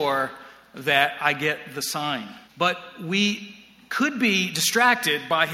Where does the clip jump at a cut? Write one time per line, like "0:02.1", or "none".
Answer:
0:02.5